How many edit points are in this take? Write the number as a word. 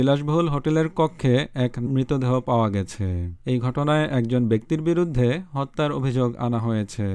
two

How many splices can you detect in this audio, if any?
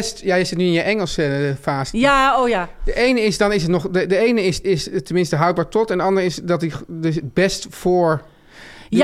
one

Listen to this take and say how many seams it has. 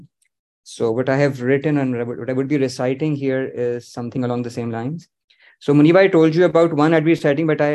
zero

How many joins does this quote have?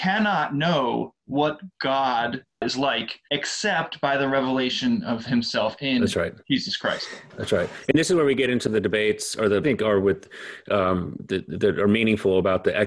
three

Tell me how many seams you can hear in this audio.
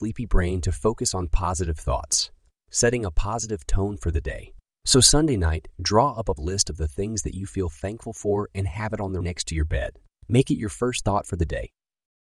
two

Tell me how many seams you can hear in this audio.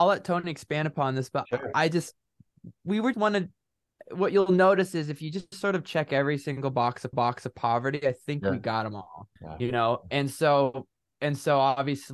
three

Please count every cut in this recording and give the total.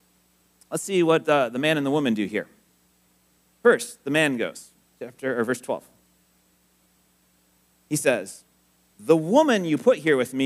zero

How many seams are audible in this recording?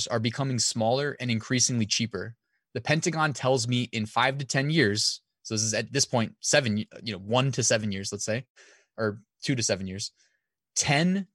zero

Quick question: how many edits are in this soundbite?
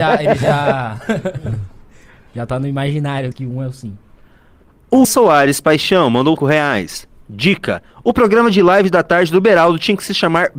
three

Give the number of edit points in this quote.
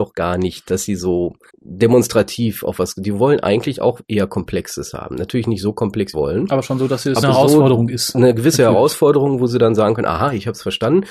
three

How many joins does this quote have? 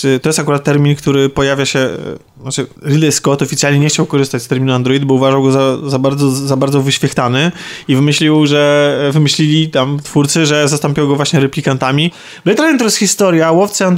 one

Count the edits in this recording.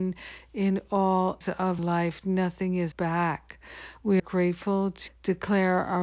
five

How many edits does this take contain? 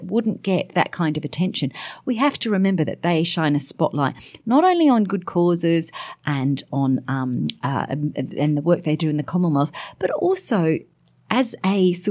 zero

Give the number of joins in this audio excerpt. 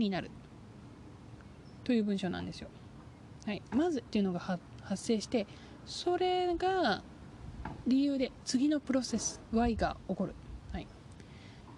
one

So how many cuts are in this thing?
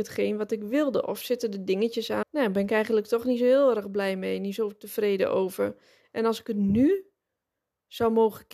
one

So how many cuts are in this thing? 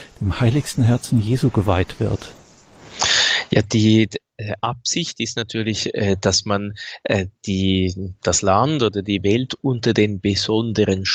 zero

